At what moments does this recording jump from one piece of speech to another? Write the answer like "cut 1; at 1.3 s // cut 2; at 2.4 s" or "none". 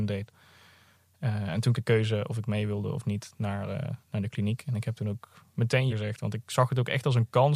cut 1; at 1.7 s // cut 2; at 4.0 s // cut 3; at 5.9 s